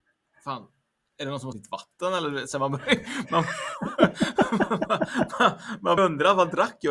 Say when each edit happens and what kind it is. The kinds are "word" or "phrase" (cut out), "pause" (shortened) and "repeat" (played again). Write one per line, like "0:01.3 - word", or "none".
0:01.5 - word
0:06.0 - word